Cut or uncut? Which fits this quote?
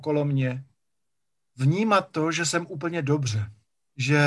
uncut